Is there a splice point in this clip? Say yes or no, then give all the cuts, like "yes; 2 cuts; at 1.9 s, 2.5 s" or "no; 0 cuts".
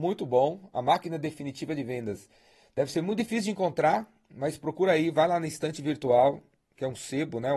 no; 0 cuts